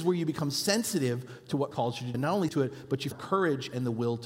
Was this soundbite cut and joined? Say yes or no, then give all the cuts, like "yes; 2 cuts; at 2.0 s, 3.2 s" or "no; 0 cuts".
yes; 4 cuts; at 1.7 s, 2.1 s, 2.5 s, 3.1 s